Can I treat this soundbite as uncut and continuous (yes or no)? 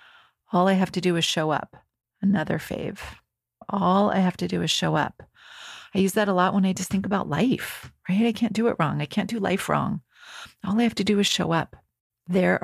yes